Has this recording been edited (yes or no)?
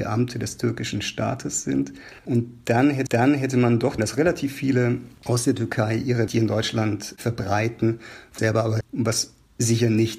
yes